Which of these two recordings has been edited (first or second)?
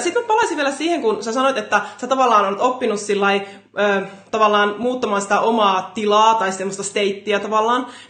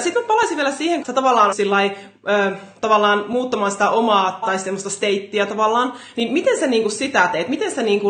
second